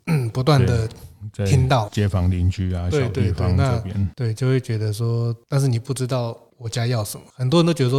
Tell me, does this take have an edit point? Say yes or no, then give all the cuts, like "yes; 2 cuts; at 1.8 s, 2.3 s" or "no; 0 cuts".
yes; 1 cut; at 1.9 s